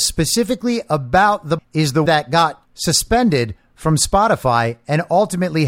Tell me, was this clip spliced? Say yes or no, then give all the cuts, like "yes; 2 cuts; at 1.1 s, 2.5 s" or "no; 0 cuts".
yes; 3 cuts; at 1.6 s, 2.1 s, 2.6 s